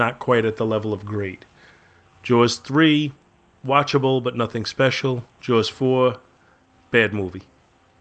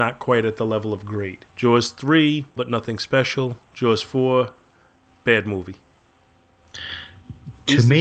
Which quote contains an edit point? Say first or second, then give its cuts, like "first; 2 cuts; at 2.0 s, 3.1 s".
second; 2 cuts; at 1.5 s, 2.6 s